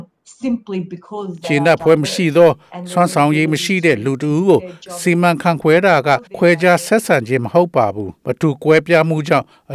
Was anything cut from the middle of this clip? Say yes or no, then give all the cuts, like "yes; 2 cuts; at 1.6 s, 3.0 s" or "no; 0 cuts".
yes; 2 cuts; at 6.3 s, 8.2 s